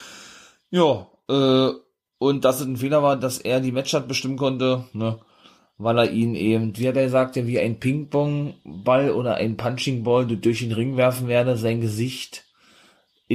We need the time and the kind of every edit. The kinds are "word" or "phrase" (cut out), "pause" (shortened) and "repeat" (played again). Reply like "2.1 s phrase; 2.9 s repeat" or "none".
none